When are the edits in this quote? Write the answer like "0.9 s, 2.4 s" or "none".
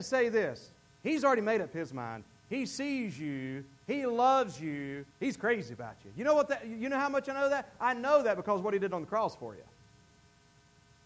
5.1 s